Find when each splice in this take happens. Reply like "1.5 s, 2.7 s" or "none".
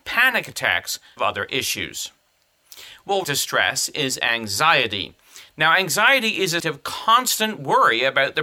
1.2 s, 3.2 s, 6.6 s